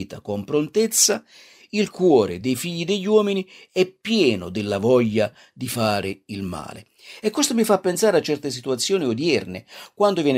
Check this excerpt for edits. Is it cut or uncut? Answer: uncut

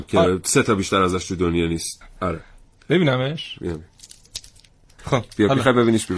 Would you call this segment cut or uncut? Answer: uncut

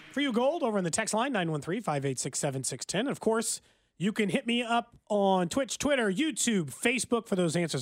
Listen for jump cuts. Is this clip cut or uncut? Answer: uncut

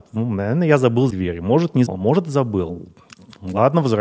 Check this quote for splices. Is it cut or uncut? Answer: cut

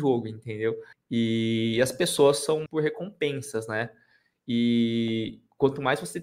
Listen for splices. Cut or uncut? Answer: cut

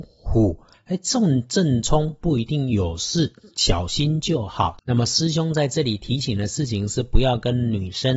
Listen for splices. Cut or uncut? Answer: uncut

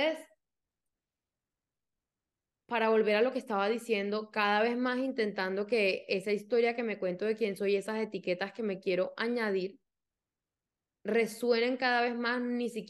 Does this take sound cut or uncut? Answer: uncut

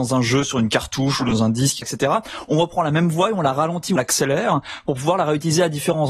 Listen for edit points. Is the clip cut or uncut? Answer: cut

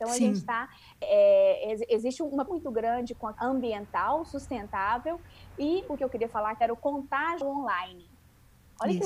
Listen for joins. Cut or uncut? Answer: cut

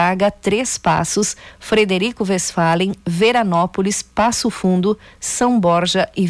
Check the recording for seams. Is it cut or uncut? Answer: uncut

